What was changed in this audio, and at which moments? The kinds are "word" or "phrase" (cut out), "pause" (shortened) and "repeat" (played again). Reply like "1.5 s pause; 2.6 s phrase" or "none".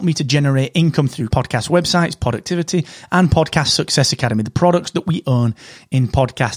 1.3 s word